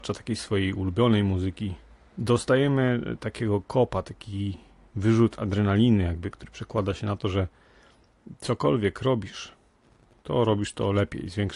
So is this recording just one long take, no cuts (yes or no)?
no